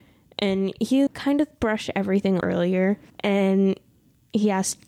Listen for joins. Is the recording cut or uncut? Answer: cut